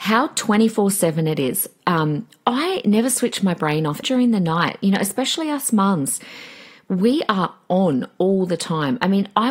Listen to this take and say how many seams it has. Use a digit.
1